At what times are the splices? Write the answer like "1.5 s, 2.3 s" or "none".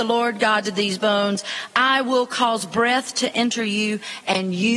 none

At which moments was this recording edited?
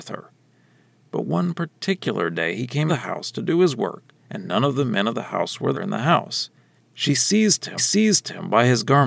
2.9 s, 4.2 s, 5.7 s, 6.8 s, 7.8 s

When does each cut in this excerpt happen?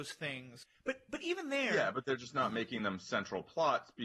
none

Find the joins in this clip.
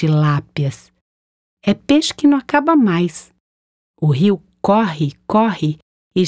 none

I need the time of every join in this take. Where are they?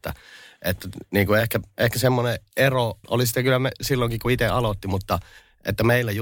none

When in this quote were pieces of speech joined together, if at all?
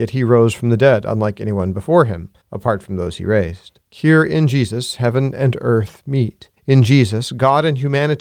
2.4 s, 3.8 s, 6.6 s

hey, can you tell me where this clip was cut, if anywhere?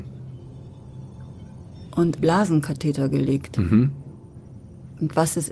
2.2 s

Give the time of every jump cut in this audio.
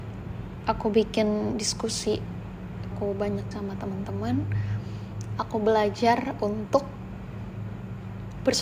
2.9 s, 3.5 s

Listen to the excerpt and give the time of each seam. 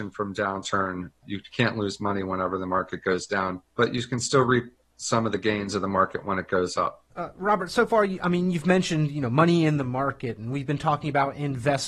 3.7 s, 7.1 s

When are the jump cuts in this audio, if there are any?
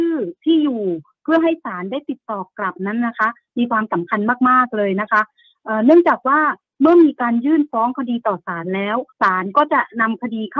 9.1 s

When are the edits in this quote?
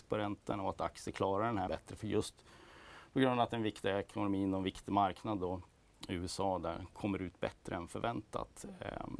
1.7 s

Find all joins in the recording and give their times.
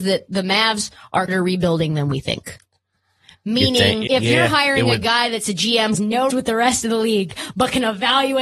1.3 s, 4.1 s, 5.9 s, 6.3 s

